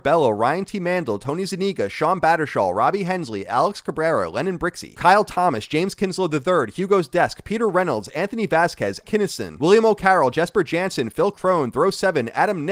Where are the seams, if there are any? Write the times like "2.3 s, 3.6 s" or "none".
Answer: 9.0 s